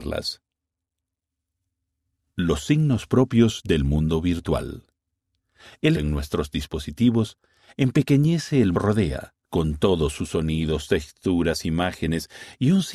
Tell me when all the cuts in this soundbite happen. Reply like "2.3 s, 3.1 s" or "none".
5.9 s, 8.7 s, 9.4 s